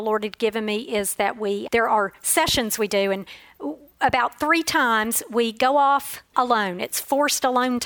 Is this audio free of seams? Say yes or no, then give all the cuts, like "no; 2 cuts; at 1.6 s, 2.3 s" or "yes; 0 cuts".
no; 2 cuts; at 1.7 s, 6.3 s